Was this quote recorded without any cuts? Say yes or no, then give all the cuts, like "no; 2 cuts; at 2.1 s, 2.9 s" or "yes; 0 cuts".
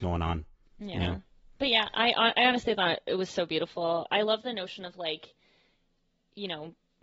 yes; 0 cuts